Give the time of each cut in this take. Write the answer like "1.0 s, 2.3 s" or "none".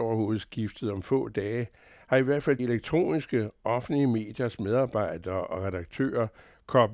2.6 s

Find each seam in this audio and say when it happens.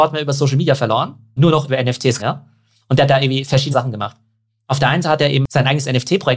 1.4 s, 1.7 s, 2.2 s, 3.7 s, 5.0 s

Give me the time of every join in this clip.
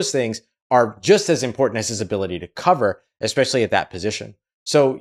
none

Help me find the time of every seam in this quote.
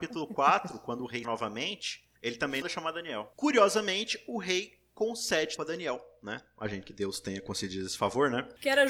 1.2 s, 2.2 s, 2.6 s, 5.6 s, 6.8 s

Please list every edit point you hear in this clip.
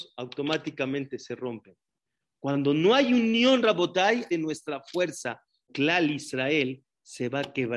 4.3 s, 5.7 s

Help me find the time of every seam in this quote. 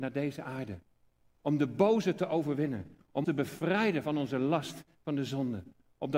3.2 s

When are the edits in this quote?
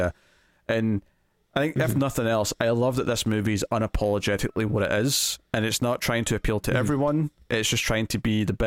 none

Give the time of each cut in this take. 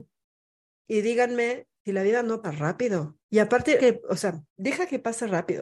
1.8 s, 2.4 s, 3.2 s, 3.8 s, 4.5 s

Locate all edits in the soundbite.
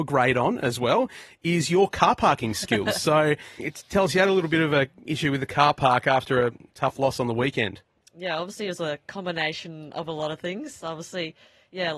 3.6 s

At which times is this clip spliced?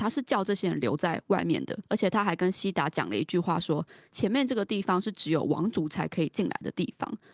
1.8 s

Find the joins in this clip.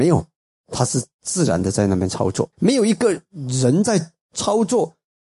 2.5 s

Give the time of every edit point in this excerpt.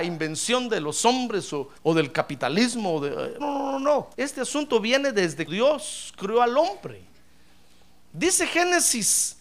1.8 s, 3.4 s, 4.1 s, 5.5 s

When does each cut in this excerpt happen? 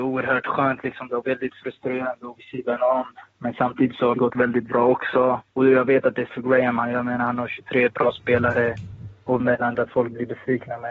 1.2 s, 2.4 s, 4.1 s, 5.5 s, 6.3 s, 9.4 s, 9.7 s

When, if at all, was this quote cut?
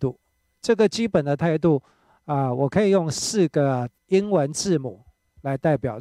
4.0 s

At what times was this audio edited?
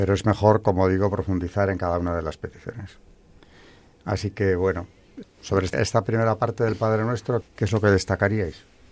5.2 s, 5.7 s, 7.4 s

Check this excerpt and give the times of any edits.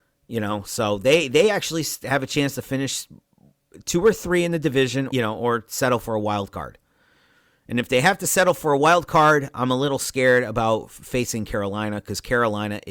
5.1 s

